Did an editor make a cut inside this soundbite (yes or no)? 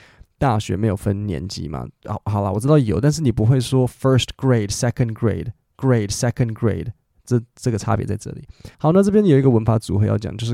yes